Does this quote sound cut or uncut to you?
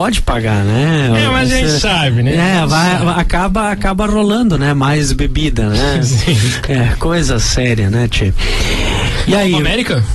uncut